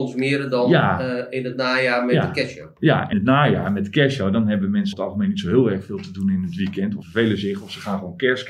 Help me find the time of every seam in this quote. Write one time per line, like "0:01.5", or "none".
0:03.1
0:04.9
0:07.0